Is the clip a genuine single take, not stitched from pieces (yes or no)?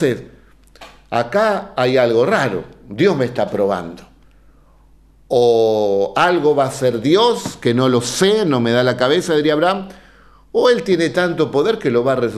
yes